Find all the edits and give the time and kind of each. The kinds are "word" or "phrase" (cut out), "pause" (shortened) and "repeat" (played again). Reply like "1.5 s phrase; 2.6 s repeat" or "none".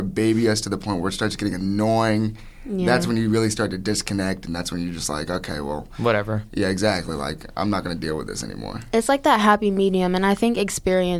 none